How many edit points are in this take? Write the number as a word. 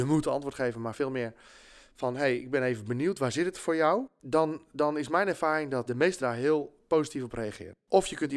two